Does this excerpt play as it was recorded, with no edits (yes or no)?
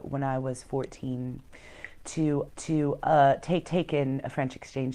no